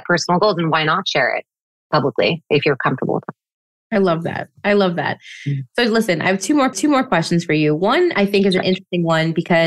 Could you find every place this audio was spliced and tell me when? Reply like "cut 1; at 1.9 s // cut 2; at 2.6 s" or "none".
cut 1; at 6.7 s